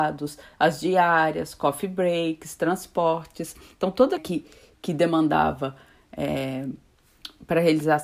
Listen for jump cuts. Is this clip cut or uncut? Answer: cut